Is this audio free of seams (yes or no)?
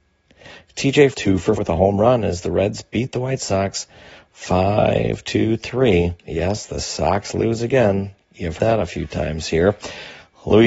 no